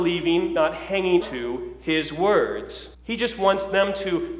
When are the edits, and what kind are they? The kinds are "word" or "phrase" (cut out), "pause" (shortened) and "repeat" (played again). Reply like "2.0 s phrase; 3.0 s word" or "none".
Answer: 1.2 s word; 2.9 s pause